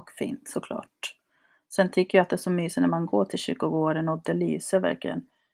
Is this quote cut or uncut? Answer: uncut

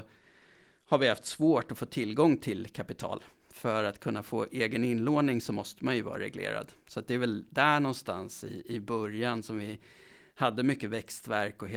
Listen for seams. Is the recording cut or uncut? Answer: uncut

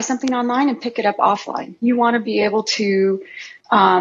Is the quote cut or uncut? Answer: uncut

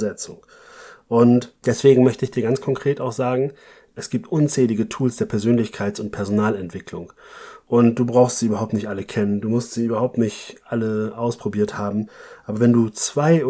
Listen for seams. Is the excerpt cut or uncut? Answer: uncut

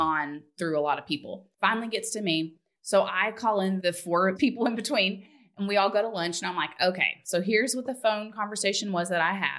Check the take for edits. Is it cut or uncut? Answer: cut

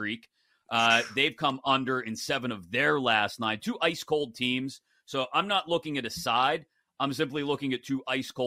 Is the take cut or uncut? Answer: uncut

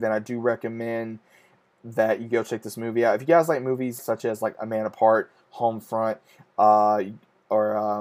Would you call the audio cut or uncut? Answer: cut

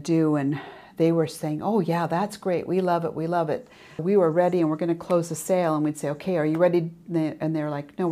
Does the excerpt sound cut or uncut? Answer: cut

